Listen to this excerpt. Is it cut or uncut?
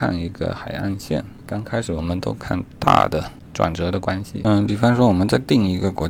uncut